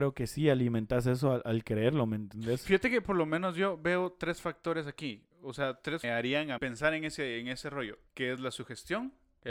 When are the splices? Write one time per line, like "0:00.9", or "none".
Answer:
0:06.0
0:06.6
0:08.1